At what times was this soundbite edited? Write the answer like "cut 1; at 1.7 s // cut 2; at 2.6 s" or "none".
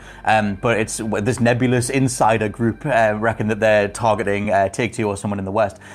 none